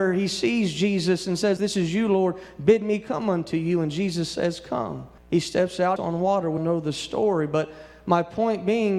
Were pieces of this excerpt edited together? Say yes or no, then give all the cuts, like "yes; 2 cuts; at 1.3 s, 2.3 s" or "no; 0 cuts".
yes; 4 cuts; at 1.6 s, 5.2 s, 6.0 s, 6.6 s